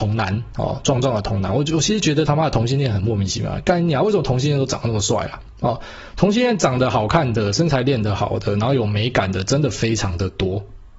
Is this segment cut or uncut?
uncut